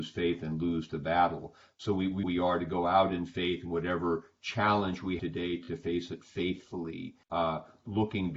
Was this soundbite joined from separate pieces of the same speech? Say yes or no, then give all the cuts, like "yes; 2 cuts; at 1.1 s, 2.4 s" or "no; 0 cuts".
yes; 3 cuts; at 2.2 s, 5.2 s, 7.2 s